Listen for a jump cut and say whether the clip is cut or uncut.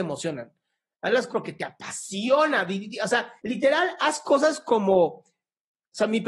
cut